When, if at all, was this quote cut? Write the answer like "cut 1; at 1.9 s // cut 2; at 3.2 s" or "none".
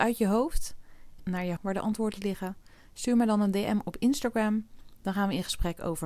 cut 1; at 1.2 s // cut 2; at 1.6 s